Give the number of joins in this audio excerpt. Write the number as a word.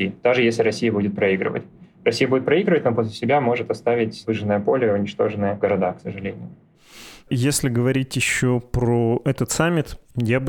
zero